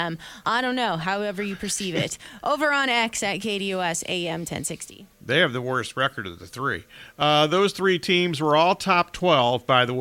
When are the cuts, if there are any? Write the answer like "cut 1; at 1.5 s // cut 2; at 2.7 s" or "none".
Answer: cut 1; at 5.1 s